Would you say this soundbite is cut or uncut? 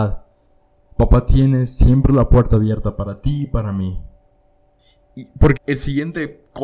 cut